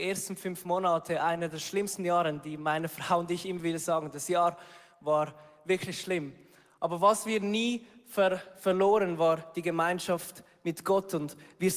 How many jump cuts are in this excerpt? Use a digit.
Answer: 0